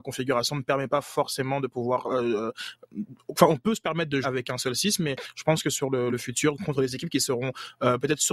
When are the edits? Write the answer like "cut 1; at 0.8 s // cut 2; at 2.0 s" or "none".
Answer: cut 1; at 4.2 s // cut 2; at 6.1 s